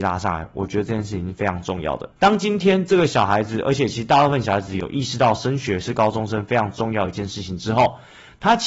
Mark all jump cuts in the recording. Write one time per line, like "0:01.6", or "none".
0:02.1